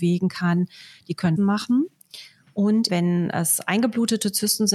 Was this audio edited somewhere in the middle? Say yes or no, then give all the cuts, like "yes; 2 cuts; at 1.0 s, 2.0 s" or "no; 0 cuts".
yes; 2 cuts; at 1.4 s, 2.9 s